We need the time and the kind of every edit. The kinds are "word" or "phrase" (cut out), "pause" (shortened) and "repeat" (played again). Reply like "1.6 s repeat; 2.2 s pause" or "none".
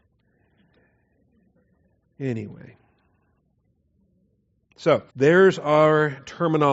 5.1 s pause